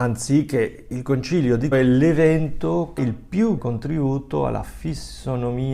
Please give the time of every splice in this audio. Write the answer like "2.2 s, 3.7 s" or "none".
1.7 s, 3.0 s, 3.6 s